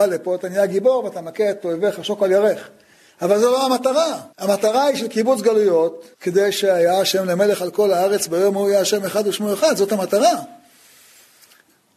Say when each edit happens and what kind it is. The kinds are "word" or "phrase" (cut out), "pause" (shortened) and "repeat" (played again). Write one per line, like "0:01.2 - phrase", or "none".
0:04.3 - pause
0:06.1 - pause